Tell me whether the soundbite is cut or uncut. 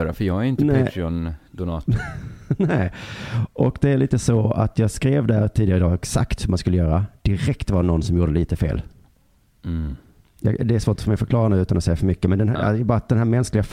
uncut